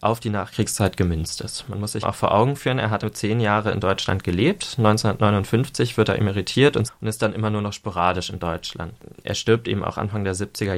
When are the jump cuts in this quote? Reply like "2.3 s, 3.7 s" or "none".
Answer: 2.0 s, 3.0 s, 6.9 s